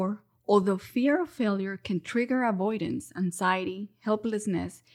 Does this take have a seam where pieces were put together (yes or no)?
no